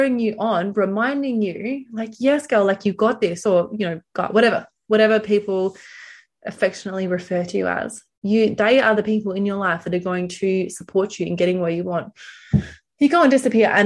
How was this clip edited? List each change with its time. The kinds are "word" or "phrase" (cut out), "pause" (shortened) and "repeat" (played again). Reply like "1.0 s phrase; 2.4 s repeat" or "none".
none